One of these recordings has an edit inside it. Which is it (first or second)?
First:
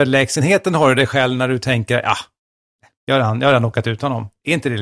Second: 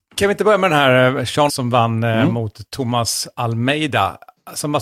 second